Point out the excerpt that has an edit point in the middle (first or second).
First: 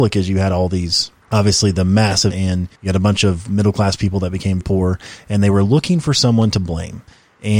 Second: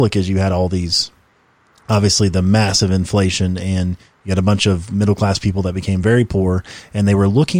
first